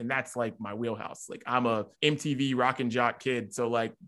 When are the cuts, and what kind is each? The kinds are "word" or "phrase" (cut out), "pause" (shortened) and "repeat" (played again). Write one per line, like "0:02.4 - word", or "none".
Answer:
0:01.9 - pause

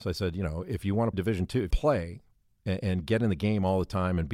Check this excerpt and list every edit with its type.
0:01.1 - word
0:01.7 - phrase

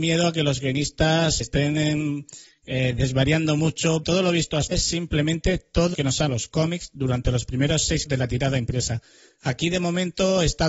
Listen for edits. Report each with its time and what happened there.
0:01.4 - word
0:04.0 - word
0:04.7 - word
0:05.9 - word
0:06.3 - word
0:08.1 - word

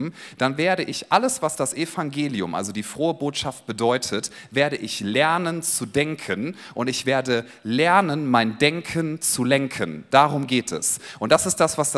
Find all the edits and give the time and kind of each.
none

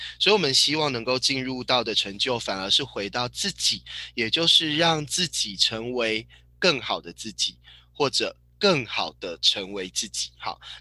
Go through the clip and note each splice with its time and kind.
none

